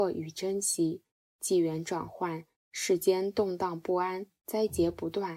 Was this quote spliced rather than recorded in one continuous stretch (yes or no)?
no